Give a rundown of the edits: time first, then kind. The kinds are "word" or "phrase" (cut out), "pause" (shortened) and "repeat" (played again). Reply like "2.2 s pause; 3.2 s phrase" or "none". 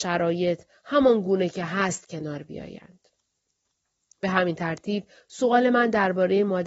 none